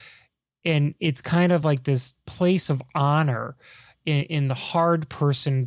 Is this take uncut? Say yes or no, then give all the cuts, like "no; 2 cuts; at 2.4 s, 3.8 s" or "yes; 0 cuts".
yes; 0 cuts